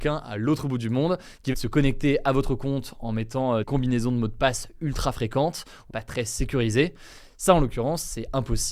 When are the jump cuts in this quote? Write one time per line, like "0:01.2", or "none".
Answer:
0:01.5
0:03.6
0:05.9